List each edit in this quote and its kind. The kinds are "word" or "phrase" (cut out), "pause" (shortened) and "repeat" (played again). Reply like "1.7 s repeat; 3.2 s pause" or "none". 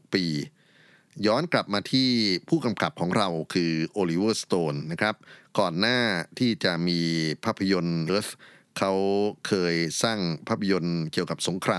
8.1 s phrase